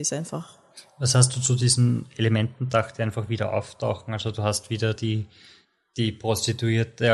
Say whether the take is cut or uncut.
uncut